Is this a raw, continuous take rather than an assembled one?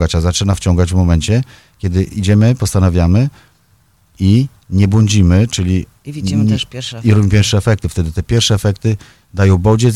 yes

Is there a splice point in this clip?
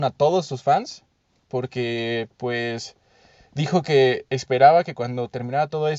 yes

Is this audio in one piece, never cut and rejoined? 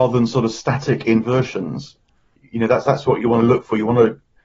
no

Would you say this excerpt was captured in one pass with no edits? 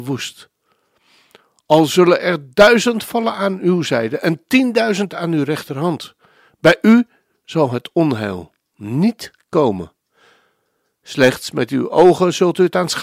yes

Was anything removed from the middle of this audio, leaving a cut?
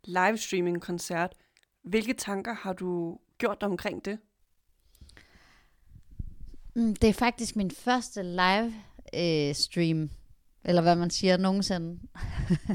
no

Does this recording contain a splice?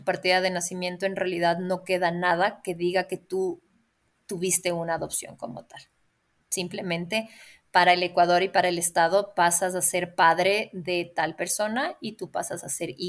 no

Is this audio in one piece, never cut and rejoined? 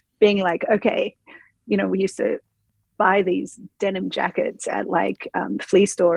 yes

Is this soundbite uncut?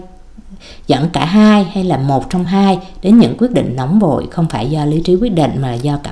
yes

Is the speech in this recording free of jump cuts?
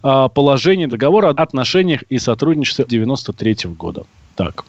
no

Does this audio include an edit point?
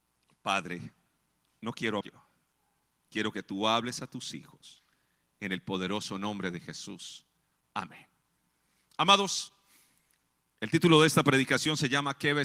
yes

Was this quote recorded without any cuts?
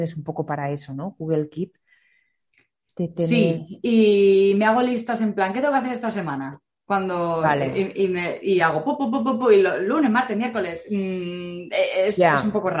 yes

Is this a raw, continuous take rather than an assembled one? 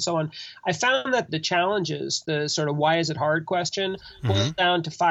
no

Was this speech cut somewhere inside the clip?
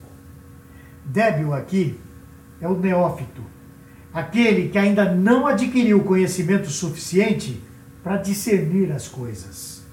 no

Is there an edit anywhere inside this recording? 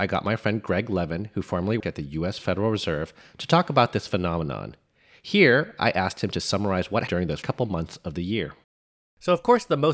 yes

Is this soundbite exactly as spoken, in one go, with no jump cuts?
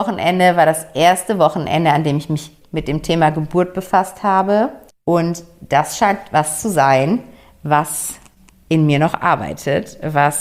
no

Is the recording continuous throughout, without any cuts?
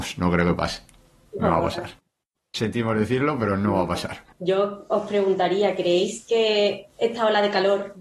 yes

